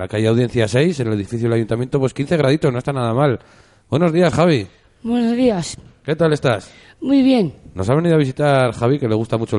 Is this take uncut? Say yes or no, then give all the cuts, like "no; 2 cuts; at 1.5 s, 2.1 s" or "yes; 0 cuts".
yes; 0 cuts